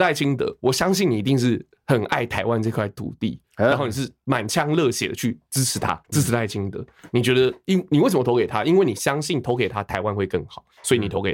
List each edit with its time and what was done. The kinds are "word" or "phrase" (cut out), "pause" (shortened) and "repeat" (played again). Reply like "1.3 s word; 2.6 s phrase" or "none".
6.0 s pause